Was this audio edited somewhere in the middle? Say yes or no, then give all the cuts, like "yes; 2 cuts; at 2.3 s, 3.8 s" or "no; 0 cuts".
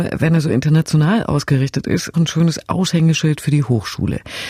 yes; 1 cut; at 2.1 s